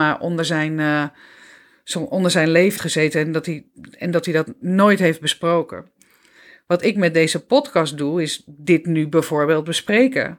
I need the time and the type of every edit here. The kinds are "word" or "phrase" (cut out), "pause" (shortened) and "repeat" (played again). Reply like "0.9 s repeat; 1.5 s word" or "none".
2.8 s word; 4.6 s word